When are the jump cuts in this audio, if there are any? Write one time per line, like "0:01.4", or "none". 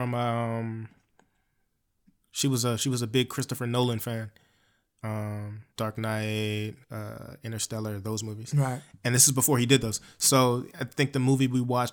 0:05.7
0:06.8
0:10.7